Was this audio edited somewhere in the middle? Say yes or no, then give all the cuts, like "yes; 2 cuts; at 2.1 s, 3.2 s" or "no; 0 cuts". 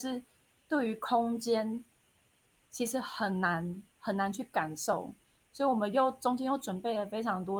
no; 0 cuts